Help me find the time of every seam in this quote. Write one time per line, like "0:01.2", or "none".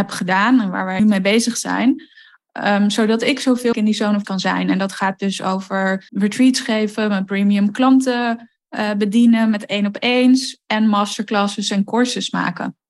0:01.0
0:03.7
0:04.2
0:06.1